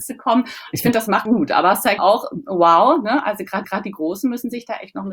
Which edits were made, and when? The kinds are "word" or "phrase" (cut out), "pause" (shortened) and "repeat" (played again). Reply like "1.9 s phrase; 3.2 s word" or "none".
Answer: 1.3 s phrase; 2.0 s word; 3.6 s repeat